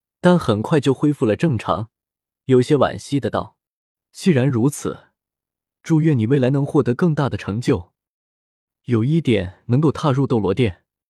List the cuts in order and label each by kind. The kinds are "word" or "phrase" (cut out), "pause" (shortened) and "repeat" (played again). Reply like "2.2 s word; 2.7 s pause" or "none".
none